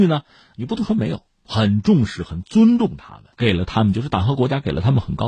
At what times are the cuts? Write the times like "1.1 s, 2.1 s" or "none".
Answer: 1.3 s, 3.3 s

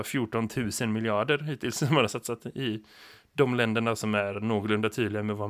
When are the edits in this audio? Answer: none

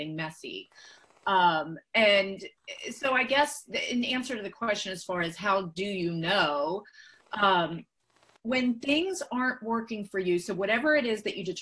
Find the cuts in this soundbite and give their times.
8.4 s

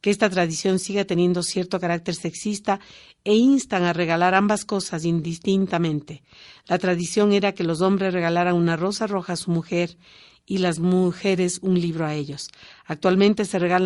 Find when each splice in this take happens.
none

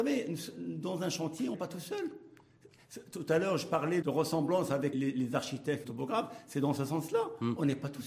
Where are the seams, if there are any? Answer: 1.5 s, 4.0 s, 4.9 s, 5.8 s

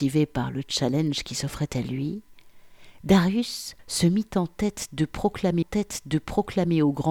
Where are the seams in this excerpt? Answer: 3.8 s, 5.6 s

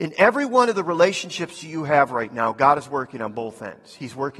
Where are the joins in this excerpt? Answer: none

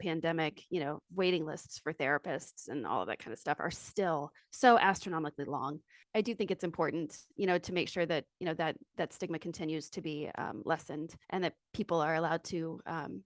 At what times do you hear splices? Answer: 4.4 s, 7.3 s, 11.2 s

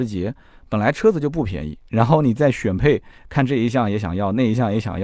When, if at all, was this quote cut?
3.2 s

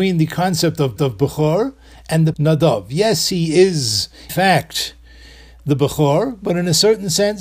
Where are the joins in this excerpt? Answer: 1.0 s, 2.3 s, 4.3 s

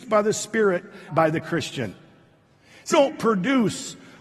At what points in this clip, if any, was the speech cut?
1.1 s, 2.9 s

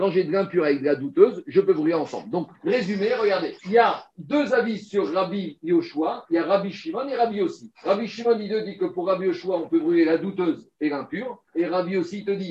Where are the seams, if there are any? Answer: 2.5 s, 3.6 s, 7.7 s, 11.5 s

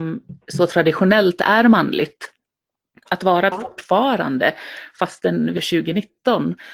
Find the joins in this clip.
3.5 s, 5.6 s

